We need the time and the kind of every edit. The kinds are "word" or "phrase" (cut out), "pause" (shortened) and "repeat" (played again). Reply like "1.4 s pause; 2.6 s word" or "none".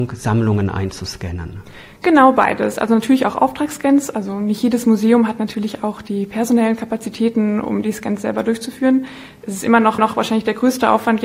10.0 s repeat